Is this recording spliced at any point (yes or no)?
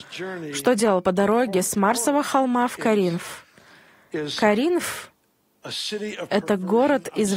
yes